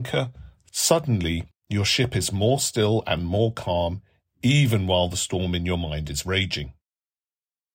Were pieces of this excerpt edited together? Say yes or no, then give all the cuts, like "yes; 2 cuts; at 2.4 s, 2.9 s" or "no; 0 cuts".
no; 0 cuts